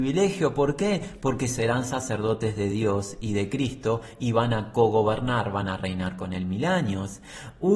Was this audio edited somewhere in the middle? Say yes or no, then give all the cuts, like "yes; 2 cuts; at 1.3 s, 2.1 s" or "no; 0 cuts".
no; 0 cuts